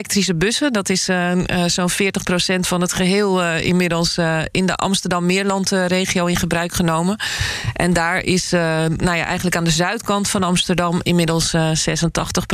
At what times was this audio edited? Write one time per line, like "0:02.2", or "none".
none